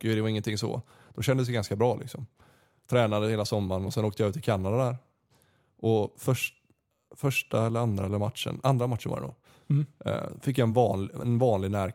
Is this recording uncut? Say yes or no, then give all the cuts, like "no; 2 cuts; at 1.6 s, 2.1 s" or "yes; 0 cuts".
yes; 0 cuts